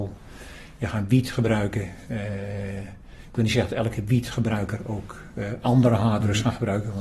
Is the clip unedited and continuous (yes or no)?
yes